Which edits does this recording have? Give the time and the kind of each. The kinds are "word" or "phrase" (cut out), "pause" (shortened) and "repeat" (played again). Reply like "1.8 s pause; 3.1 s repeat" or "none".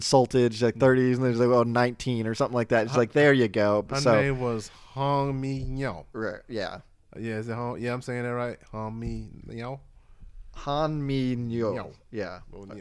none